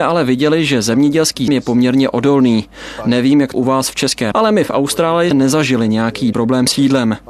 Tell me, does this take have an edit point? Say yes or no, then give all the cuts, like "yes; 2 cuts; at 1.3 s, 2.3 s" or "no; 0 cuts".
yes; 5 cuts; at 1.5 s, 3.5 s, 4.3 s, 5.3 s, 6.3 s